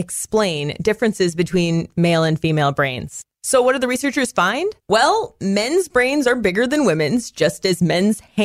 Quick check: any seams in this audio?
yes; 1 cut; at 4.8 s

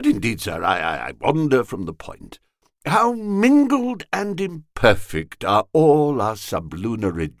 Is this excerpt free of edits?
yes; 0 cuts

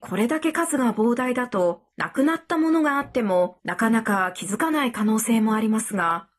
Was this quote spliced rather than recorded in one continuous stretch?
yes; 2 cuts; at 1.9 s, 3.6 s

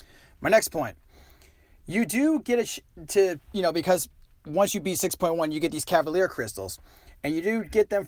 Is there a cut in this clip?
no; 0 cuts

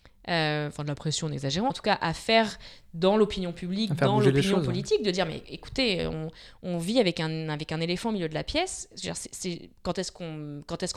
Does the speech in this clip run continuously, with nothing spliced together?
no; 1 cut; at 1.7 s

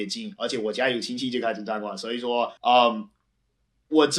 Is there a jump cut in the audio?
yes; 1 cut; at 2.6 s

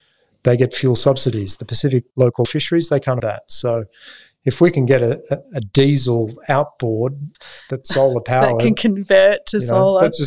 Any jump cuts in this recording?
yes; 4 cuts; at 2.4 s, 3.2 s, 5.4 s, 7.3 s

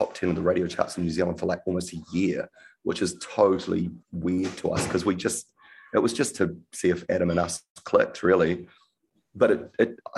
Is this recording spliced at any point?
yes; 1 cut; at 4.0 s

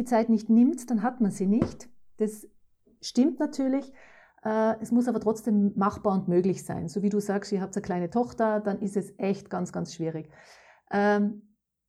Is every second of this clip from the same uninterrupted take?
yes; 0 cuts

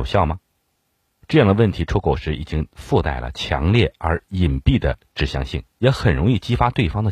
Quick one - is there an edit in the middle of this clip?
yes; 1 cut; at 5.7 s

